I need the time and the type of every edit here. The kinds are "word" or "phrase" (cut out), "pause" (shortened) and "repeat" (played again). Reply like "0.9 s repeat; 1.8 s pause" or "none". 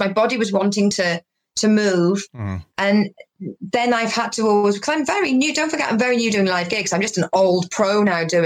none